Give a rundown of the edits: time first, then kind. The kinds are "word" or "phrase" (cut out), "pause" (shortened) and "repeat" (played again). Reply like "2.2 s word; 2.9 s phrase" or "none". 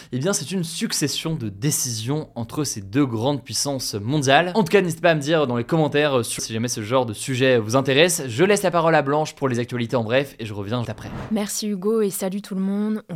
6.4 s word; 10.8 s word